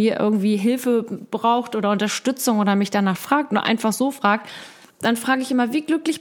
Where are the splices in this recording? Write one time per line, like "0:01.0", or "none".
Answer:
none